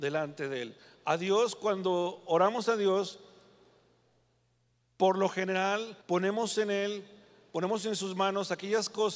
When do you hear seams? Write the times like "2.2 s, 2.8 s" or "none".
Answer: 6.0 s